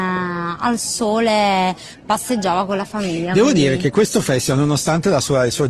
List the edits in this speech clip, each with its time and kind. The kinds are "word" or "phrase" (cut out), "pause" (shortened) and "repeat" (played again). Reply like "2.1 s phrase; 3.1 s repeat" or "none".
none